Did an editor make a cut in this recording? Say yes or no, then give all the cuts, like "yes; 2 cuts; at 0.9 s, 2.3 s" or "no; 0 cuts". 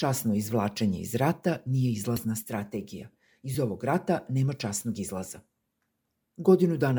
no; 0 cuts